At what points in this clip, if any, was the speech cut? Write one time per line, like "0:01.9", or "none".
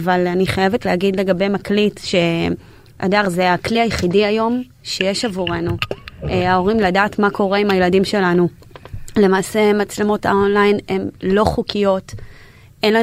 none